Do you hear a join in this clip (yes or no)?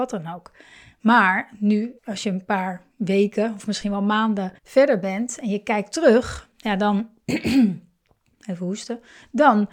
yes